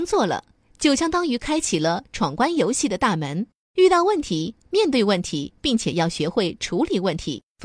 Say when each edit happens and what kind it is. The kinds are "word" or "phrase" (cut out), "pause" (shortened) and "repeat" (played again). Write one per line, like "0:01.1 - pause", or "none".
0:05.6 - pause